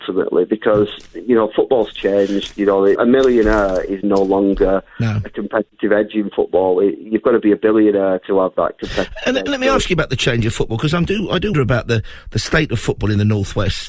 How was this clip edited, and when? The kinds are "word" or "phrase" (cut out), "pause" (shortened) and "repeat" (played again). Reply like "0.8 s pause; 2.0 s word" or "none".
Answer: 3.0 s word; 4.0 s word; 11.5 s word